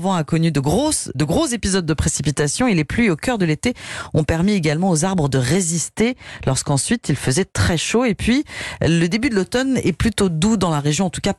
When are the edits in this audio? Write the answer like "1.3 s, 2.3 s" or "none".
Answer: 1.1 s